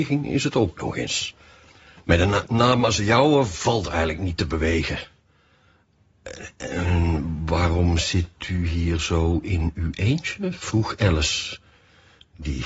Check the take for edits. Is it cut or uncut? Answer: uncut